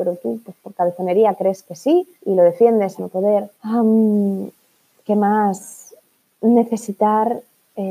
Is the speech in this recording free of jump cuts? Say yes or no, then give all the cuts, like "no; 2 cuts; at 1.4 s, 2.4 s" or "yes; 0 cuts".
no; 3 cuts; at 2.2 s, 3.0 s, 3.5 s